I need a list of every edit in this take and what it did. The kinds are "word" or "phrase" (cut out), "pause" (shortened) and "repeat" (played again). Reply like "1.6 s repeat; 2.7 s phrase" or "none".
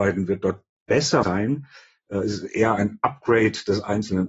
1.2 s word